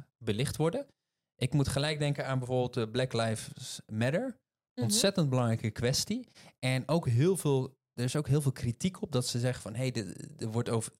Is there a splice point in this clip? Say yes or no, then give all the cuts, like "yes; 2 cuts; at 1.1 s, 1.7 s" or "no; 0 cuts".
no; 0 cuts